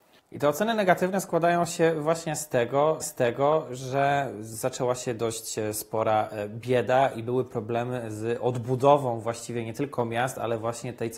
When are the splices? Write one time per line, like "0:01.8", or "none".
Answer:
0:03.0